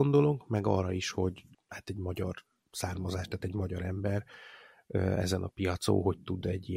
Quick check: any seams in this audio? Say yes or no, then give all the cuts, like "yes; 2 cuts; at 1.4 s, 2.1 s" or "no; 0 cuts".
no; 0 cuts